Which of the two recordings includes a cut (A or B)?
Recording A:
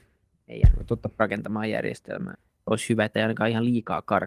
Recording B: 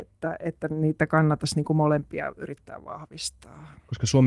A